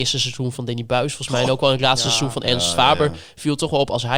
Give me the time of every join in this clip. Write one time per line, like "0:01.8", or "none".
none